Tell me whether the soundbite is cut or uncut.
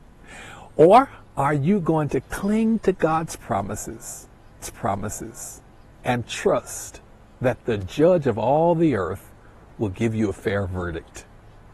cut